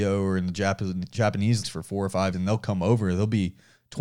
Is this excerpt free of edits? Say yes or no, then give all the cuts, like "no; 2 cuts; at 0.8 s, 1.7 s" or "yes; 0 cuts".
no; 2 cuts; at 1.6 s, 2.3 s